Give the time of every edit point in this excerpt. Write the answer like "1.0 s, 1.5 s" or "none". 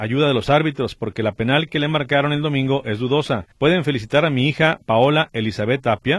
3.5 s